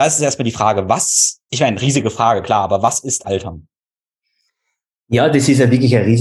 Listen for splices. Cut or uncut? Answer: cut